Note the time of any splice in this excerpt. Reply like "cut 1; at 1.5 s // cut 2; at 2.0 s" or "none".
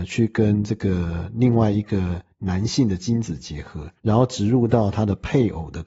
cut 1; at 4.0 s